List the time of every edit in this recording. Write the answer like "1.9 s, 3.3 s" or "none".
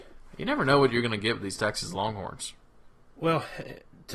none